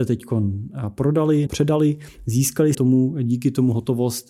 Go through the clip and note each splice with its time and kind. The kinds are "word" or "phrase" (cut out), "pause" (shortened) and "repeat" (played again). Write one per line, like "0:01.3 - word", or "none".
0:01.5 - word
0:02.7 - word